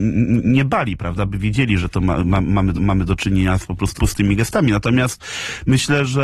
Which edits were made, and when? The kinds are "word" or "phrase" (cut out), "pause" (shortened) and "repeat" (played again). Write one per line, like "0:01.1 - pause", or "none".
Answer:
0:02.7 - repeat
0:04.0 - phrase